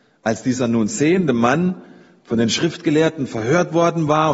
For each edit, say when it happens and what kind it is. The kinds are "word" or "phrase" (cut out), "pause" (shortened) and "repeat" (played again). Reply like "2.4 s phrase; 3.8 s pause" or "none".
none